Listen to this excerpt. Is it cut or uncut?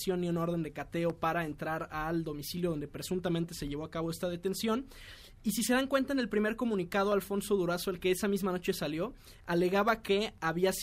uncut